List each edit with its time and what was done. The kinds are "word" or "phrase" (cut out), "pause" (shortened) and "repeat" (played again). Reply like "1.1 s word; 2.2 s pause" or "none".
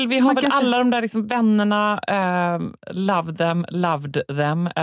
none

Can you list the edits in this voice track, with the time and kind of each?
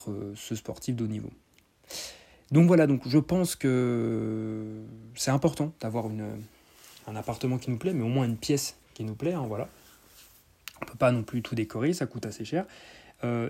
none

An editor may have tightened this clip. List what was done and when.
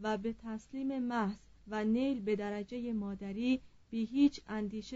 1.6 s pause

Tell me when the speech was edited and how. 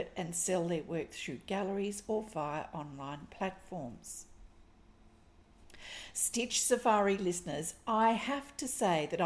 none

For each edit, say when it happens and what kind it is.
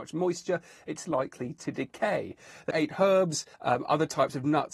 1.0 s word; 2.7 s word; 3.5 s pause

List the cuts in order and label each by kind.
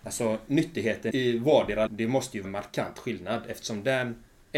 1.1 s word; 1.9 s word; 2.4 s word

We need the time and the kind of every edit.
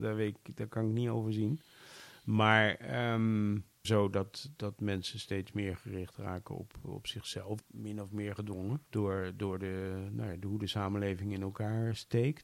3.8 s word; 7.6 s word; 8.9 s pause

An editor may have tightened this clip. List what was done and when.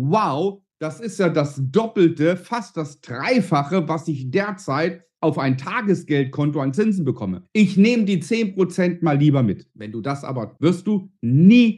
10.6 s word

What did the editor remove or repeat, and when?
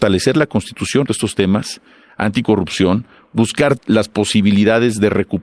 1.0 s word; 3.8 s word

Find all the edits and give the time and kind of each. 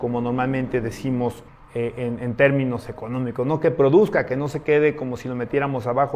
1.5 s pause

